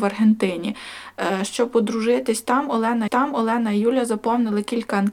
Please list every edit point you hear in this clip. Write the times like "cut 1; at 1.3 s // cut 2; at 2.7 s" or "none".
cut 1; at 3.1 s